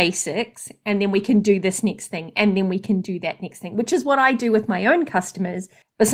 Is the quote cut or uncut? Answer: uncut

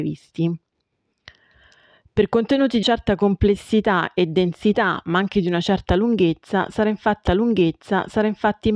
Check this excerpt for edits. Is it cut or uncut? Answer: cut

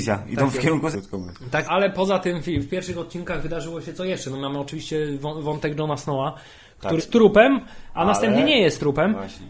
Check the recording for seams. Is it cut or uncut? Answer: cut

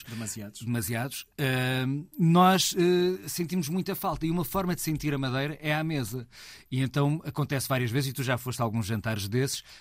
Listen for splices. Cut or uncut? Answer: uncut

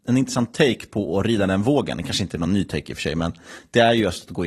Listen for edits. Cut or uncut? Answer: uncut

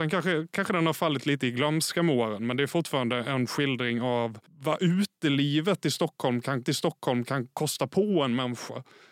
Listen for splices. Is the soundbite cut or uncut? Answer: cut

